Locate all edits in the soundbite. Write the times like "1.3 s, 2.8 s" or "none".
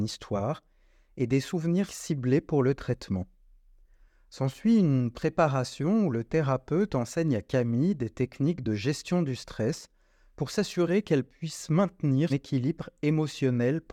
1.9 s, 12.3 s